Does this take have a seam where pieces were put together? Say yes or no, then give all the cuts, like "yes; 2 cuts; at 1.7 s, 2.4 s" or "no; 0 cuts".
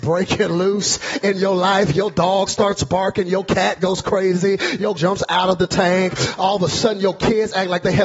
yes; 1 cut; at 5.0 s